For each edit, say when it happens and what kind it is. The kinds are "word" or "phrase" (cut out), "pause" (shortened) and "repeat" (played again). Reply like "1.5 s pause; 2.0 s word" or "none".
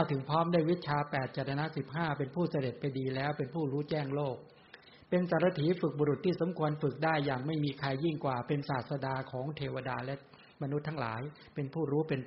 none